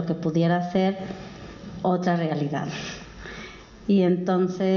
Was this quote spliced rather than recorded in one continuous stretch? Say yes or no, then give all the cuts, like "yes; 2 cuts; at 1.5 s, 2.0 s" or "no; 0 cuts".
no; 0 cuts